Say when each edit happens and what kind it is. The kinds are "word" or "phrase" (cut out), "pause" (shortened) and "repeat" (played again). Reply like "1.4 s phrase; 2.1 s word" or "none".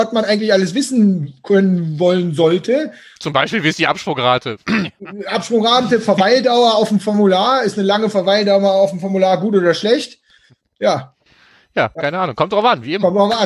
none

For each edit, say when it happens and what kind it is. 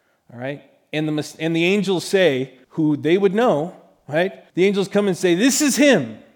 2.6 s pause; 4.5 s pause

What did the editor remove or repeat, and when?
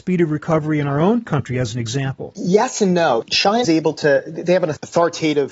3.6 s word

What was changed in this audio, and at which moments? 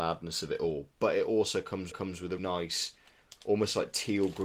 1.9 s repeat; 2.4 s word

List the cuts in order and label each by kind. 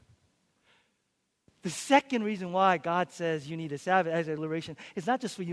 4.4 s word

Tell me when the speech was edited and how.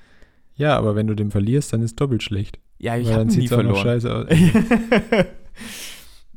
1.3 s word; 2.7 s pause

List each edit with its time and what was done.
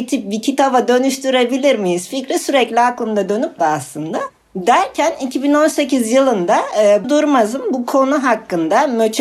3.6 s word; 7.0 s word

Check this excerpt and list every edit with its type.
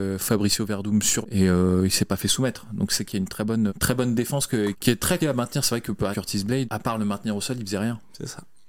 1.2 s word; 3.0 s word; 3.7 s word; 4.7 s word; 5.2 s word; 6.1 s word; 6.6 s word

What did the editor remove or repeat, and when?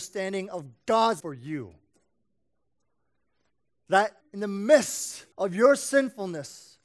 1.2 s word; 4.2 s word; 5.3 s pause

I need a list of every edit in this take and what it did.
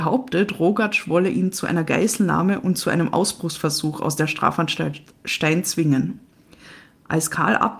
none

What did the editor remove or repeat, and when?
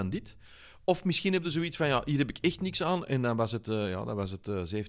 none

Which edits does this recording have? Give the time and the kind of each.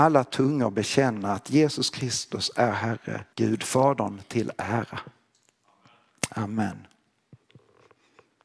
3.3 s pause

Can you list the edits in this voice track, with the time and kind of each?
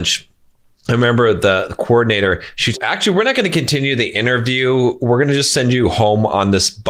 2.7 s phrase

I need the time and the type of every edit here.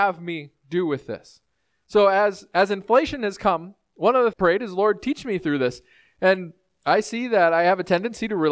4.3 s phrase

